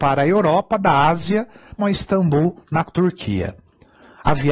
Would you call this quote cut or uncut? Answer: cut